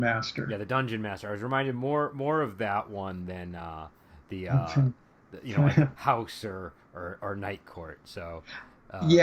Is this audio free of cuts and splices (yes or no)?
yes